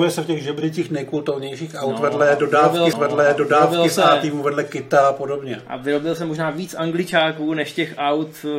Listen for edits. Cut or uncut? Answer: cut